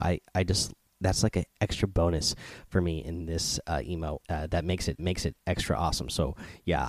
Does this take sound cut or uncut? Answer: cut